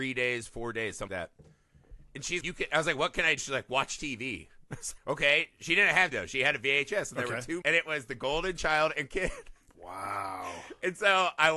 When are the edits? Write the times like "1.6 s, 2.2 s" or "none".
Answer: 1.1 s, 2.4 s, 3.4 s, 5.0 s, 6.1 s, 7.6 s, 9.1 s